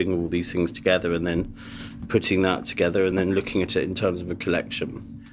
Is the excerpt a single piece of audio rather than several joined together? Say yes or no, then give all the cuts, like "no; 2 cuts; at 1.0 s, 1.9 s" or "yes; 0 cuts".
yes; 0 cuts